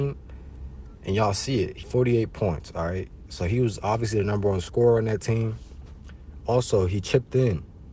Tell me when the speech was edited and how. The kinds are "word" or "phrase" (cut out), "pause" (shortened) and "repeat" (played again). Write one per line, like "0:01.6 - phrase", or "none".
0:01.8 - word